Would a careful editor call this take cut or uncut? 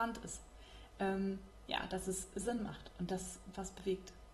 uncut